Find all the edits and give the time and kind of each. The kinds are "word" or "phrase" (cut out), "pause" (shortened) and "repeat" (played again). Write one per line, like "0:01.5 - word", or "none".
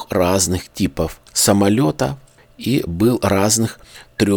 0:01.3 - pause